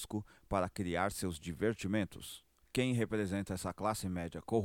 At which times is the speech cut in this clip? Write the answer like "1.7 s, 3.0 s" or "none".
2.6 s